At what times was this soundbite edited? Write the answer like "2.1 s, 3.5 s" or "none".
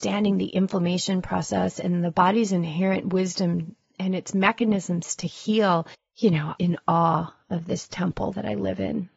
5.9 s, 6.6 s